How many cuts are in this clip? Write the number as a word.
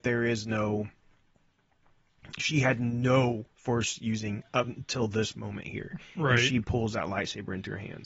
two